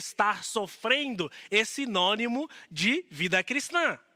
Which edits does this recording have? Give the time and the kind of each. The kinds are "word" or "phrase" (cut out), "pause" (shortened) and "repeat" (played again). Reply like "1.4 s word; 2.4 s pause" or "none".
none